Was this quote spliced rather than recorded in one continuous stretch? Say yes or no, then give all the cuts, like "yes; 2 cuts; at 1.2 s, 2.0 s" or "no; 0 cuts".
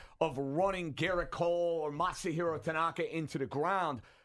no; 0 cuts